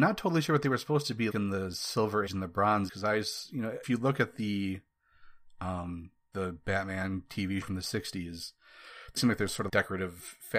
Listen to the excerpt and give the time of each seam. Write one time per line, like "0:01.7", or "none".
0:01.3
0:02.3
0:02.9
0:03.8
0:06.3
0:07.6
0:09.2
0:09.7